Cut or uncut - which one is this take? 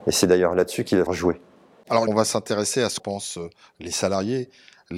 cut